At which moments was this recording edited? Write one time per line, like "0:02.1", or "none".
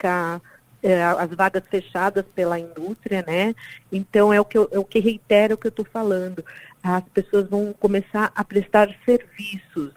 none